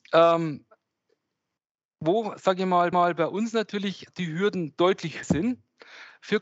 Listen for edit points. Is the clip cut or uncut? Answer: cut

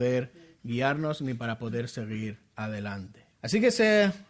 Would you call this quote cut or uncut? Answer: cut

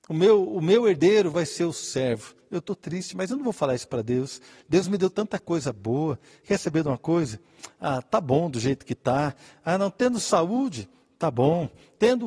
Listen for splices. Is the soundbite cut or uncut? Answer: uncut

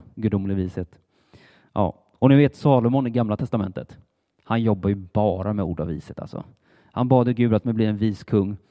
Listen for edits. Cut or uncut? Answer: cut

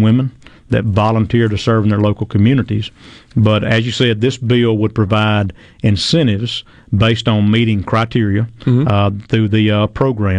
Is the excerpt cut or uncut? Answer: uncut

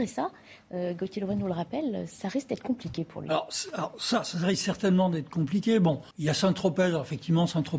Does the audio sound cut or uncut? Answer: cut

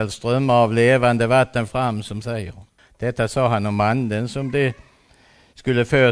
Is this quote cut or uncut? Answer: cut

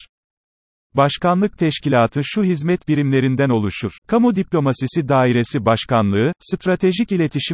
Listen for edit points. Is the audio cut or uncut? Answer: cut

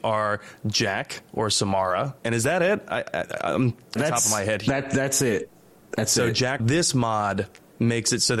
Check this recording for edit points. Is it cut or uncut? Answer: cut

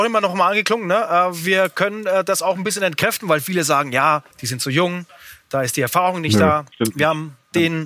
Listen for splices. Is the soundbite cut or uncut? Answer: cut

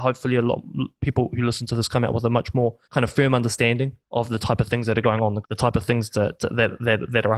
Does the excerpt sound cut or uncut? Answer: cut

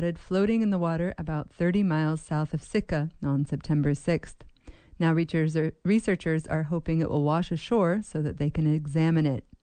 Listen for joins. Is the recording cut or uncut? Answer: uncut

